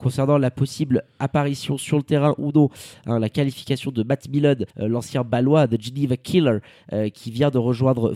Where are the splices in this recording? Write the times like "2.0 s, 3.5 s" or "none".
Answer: 4.7 s